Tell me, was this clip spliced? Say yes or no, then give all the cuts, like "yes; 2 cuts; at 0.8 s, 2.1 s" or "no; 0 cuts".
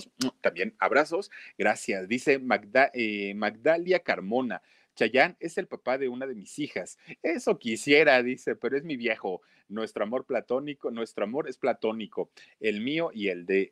no; 0 cuts